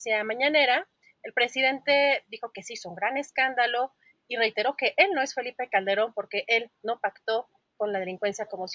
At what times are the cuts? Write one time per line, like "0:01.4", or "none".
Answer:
none